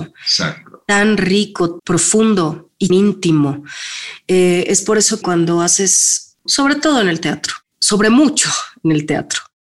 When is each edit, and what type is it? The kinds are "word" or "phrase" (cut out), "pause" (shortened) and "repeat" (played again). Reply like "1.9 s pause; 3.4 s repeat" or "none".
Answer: 1.8 s word; 2.9 s word; 5.2 s word; 6.5 s word; 7.7 s word